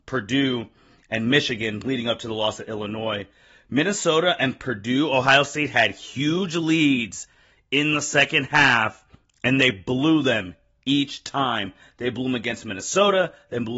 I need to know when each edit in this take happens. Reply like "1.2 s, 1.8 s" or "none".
none